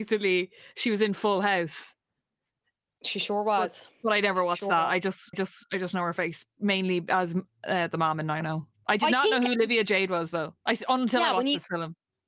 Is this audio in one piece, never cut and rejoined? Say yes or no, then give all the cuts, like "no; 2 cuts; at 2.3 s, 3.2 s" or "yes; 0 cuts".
no; 3 cuts; at 5.3 s, 8.4 s, 10.6 s